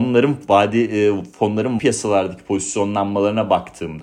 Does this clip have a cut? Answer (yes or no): yes